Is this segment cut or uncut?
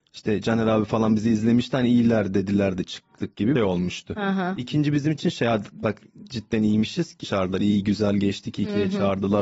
cut